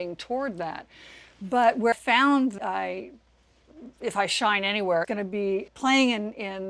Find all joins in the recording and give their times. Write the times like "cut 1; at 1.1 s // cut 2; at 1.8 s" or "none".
cut 1; at 1.9 s // cut 2; at 2.6 s // cut 3; at 5.0 s // cut 4; at 5.7 s